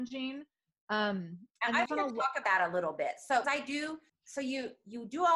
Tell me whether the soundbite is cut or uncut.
cut